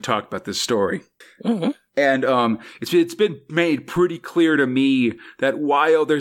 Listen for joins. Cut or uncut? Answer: uncut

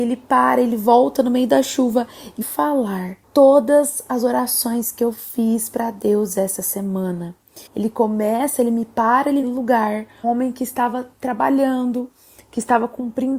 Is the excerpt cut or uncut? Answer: cut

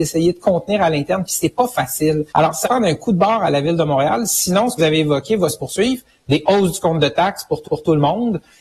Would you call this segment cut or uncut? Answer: cut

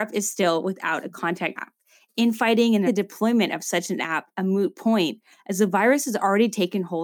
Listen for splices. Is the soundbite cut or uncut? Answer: cut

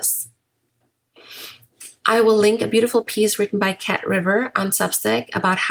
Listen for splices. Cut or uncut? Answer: uncut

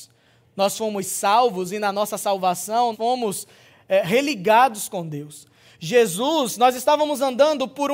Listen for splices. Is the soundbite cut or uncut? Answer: cut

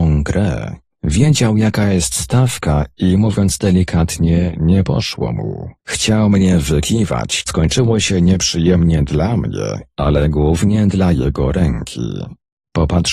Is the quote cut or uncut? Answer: cut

